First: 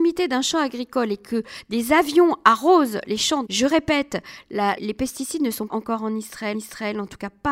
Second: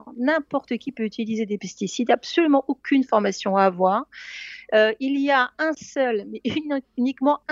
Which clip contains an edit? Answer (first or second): first